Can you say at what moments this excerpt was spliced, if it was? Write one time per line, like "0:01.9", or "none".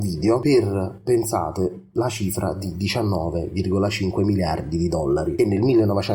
none